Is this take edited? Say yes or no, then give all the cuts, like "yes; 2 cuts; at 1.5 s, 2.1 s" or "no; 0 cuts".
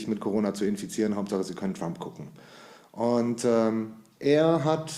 no; 0 cuts